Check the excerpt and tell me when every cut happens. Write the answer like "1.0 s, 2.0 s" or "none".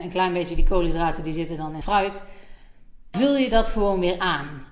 1.8 s, 3.1 s